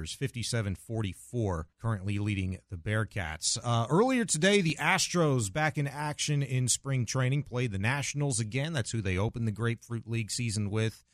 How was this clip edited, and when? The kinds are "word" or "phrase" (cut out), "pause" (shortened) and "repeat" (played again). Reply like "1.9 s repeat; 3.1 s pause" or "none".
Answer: 1.7 s pause